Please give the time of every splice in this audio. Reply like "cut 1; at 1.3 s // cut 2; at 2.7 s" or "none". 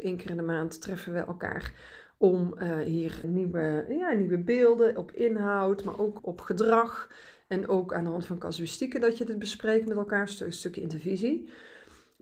cut 1; at 3.2 s // cut 2; at 6.2 s